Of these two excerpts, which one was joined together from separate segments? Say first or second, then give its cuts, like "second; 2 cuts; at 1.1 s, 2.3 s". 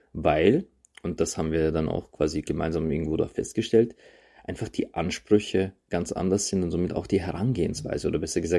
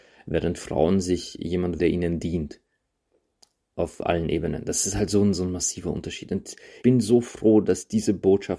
second; 2 cuts; at 1.8 s, 6.8 s